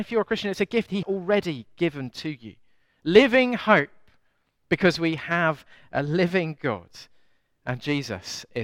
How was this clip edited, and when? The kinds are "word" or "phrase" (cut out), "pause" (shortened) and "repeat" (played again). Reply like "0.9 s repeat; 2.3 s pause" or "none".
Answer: 1.0 s word